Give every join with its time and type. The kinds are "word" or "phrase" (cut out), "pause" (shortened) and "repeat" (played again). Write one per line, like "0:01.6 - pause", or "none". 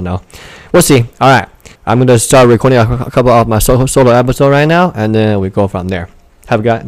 0:01.8 - pause